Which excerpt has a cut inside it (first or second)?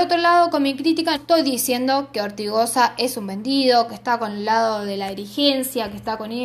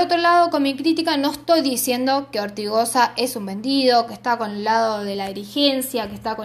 first